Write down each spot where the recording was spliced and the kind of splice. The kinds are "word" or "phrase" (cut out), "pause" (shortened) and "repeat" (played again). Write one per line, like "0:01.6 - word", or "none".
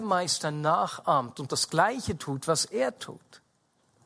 none